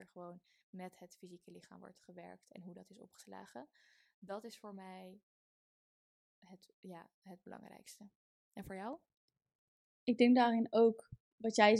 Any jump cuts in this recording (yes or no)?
no